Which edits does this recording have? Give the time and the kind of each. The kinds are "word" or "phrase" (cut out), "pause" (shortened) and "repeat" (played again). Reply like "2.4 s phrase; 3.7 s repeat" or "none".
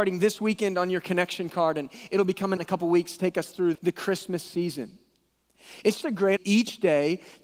2.6 s word; 3.7 s word; 6.0 s word; 6.4 s word